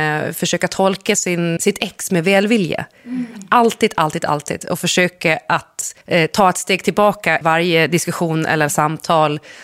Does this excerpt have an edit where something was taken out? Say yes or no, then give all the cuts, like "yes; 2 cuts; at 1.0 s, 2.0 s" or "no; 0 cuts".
yes; 3 cuts; at 1.6 s, 6.0 s, 7.4 s